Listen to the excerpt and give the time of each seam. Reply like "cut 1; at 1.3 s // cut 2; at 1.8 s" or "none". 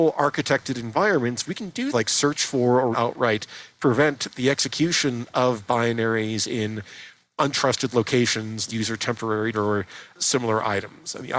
cut 1; at 1.9 s // cut 2; at 2.9 s // cut 3; at 8.7 s // cut 4; at 9.5 s